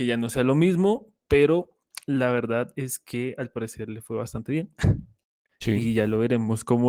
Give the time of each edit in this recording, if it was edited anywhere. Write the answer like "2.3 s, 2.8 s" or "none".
none